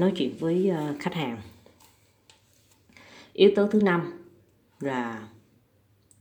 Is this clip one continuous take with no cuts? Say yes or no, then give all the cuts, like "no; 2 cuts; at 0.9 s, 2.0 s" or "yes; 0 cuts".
yes; 0 cuts